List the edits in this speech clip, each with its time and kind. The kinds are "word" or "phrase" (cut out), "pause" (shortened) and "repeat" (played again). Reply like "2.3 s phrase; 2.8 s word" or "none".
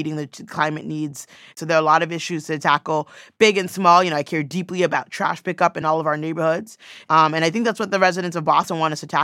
none